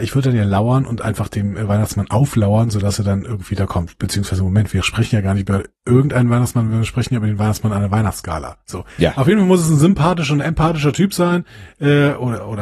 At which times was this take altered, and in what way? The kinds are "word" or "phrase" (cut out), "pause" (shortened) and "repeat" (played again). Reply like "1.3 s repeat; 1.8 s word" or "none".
8.9 s pause